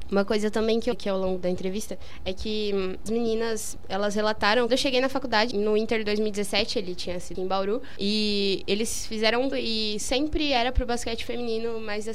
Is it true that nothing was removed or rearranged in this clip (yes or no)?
no